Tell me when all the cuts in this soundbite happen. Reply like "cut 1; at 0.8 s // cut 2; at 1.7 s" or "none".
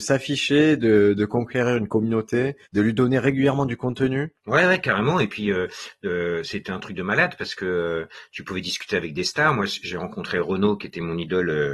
cut 1; at 2.6 s // cut 2; at 4.4 s